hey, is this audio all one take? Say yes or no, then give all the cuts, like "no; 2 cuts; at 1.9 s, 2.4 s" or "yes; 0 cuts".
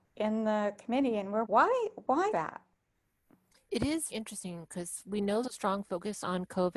no; 4 cuts; at 1.4 s, 2.3 s, 4.1 s, 5.4 s